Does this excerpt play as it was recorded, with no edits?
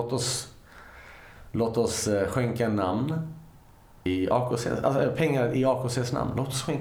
yes; 0 cuts

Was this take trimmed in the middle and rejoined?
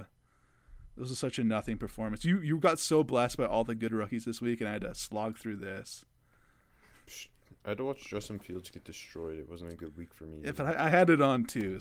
no; 0 cuts

